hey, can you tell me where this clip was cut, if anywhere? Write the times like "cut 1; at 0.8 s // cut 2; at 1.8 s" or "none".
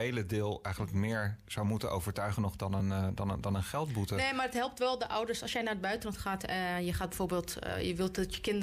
none